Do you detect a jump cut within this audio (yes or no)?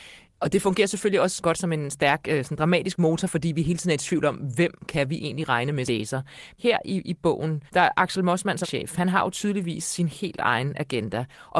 yes